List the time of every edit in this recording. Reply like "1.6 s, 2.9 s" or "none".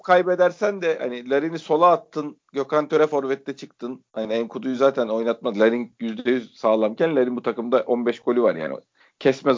4.1 s